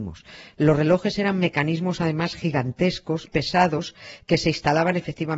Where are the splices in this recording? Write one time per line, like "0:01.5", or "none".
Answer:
0:03.3